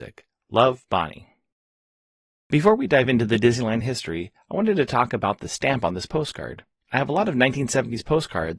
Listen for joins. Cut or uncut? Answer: uncut